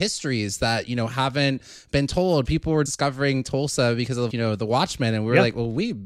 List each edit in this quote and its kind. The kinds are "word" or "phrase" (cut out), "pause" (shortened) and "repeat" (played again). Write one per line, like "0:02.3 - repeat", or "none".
0:02.9 - word
0:04.3 - word